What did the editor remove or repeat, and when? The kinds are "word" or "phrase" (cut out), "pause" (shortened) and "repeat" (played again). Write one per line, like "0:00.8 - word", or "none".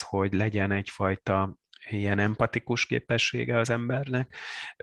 none